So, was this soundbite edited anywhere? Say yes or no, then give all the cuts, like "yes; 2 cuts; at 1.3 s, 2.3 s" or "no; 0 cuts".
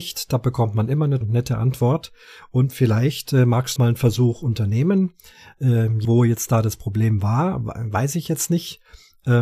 yes; 3 cuts; at 1.2 s, 3.8 s, 6.0 s